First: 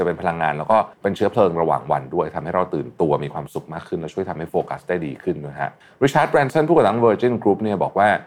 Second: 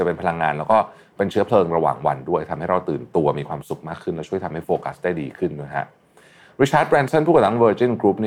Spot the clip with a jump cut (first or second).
first